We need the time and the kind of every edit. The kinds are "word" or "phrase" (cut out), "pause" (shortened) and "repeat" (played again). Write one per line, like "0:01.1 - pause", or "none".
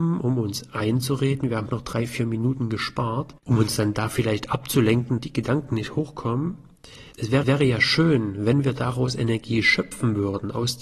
0:01.7 - phrase
0:03.4 - pause
0:05.2 - word
0:07.1 - pause
0:07.4 - repeat